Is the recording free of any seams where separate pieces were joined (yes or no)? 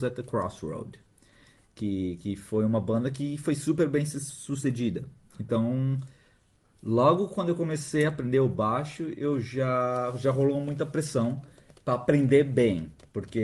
yes